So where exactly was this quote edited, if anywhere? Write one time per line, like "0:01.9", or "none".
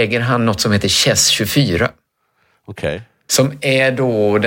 none